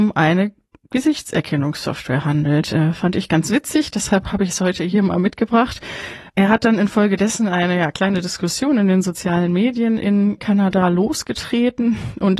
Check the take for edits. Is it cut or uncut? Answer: cut